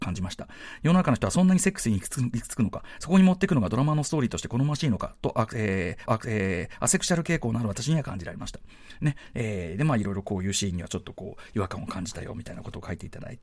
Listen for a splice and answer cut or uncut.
cut